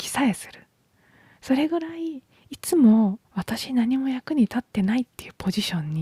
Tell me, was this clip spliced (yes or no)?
yes